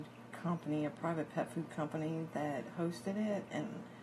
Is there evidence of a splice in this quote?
no; 0 cuts

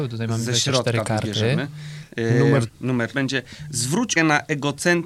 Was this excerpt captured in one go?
no; 3 cuts; at 2.7 s, 3.1 s, 4.2 s

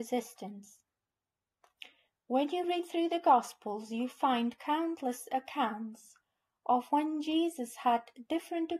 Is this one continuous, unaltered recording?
yes; 0 cuts

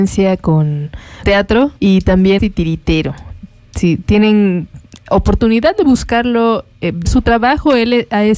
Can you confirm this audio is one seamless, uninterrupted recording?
no; 4 cuts; at 1.2 s, 1.8 s, 2.4 s, 7.0 s

